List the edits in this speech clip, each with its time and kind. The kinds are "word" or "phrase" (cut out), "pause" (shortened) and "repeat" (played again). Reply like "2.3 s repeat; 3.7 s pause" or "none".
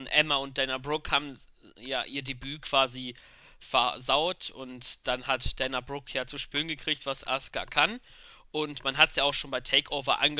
none